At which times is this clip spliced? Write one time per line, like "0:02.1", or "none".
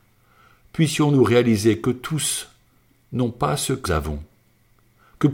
0:03.8